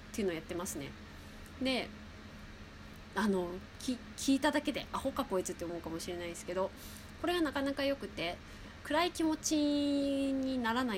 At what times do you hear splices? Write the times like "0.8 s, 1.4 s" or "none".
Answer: 3.1 s, 8.8 s